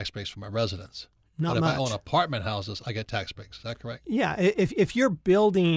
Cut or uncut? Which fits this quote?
uncut